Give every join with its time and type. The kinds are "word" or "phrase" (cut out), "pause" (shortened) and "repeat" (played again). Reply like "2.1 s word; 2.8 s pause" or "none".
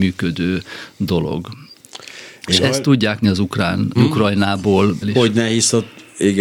3.2 s word; 4.0 s word; 5.0 s word